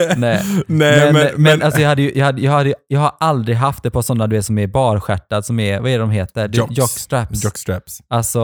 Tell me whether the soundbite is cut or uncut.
uncut